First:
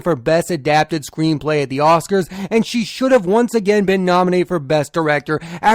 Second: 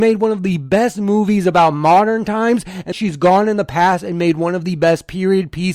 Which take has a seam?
second; 1 cut; at 2.9 s

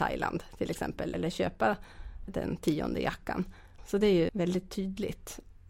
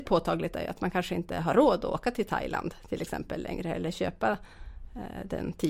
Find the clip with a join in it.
first; 3 cuts; at 1.1 s, 2.3 s, 4.3 s

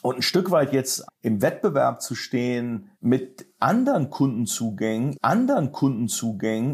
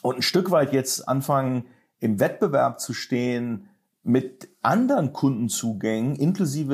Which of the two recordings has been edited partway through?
first; 3 cuts; at 1.1 s, 2.9 s, 5.1 s

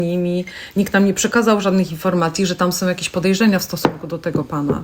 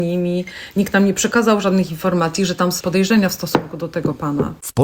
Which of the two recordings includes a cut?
second; 1 cut; at 2.8 s

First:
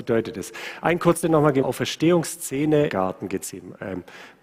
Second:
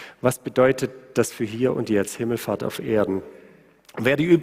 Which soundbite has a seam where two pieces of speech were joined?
first; 3 cuts; at 1.2 s, 1.6 s, 2.9 s

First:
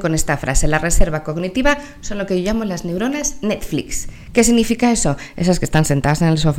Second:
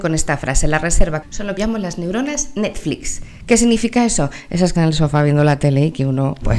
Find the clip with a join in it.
second; 3 cuts; at 1.2 s, 1.6 s, 4.7 s

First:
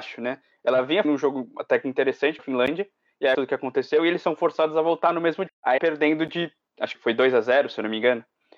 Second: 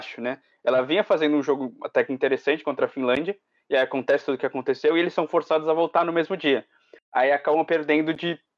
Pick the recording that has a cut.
first; 6 cuts; at 1.0 s, 2.4 s, 3.3 s, 5.5 s, 5.8 s, 6.9 s

